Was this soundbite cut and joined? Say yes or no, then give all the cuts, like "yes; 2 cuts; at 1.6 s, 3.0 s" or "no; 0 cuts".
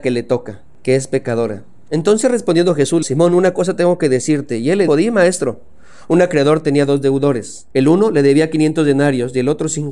yes; 3 cuts; at 3.0 s, 4.9 s, 7.7 s